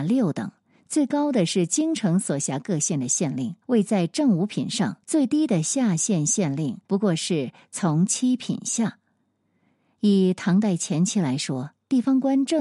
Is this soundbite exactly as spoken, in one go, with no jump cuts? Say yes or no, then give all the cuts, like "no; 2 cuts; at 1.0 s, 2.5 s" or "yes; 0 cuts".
no; 3 cuts; at 3.6 s, 5.0 s, 6.8 s